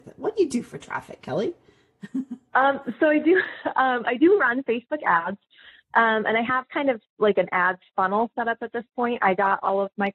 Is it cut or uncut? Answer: uncut